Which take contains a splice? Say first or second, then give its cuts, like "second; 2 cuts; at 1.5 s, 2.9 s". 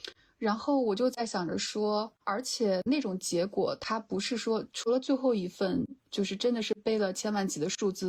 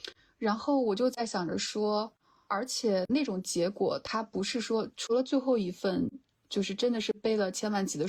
first; 2 cuts; at 2.2 s, 6.0 s